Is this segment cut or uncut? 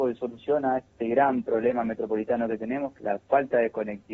cut